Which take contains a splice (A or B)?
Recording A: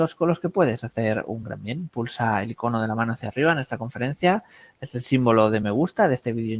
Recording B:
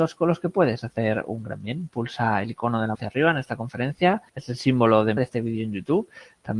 B